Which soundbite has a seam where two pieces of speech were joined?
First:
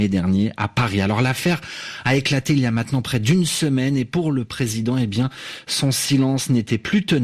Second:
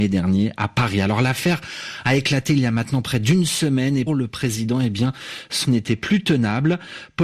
second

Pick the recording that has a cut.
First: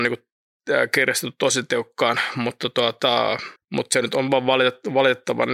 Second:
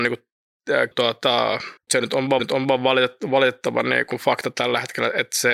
second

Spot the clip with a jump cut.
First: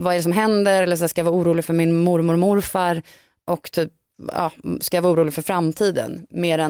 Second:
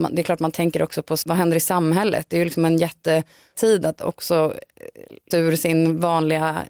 second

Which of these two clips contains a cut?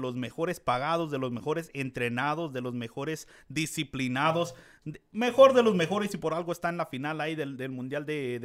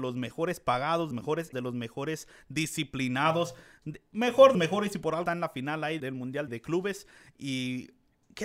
second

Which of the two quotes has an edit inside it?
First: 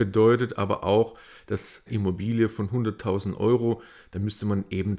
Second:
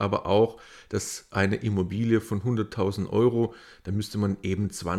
first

